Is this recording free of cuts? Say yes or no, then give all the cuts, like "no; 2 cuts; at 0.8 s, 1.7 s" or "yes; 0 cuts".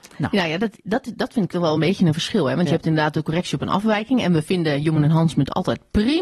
yes; 0 cuts